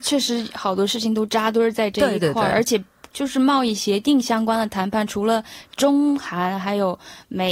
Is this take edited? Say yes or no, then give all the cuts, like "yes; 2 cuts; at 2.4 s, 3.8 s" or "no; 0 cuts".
no; 0 cuts